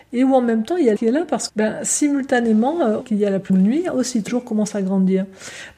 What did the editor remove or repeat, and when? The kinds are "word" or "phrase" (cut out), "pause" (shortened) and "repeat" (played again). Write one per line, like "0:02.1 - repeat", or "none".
0:01.0 - word
0:01.5 - word
0:03.0 - word
0:03.5 - word
0:04.3 - word